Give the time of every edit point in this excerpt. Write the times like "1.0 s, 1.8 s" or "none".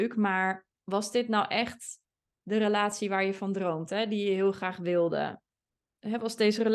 none